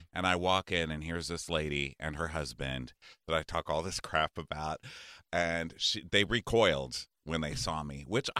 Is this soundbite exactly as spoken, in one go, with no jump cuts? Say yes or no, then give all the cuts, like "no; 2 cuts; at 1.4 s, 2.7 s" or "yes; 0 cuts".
yes; 0 cuts